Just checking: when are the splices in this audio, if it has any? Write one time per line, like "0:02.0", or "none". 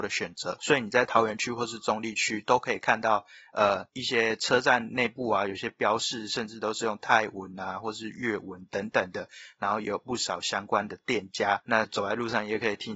none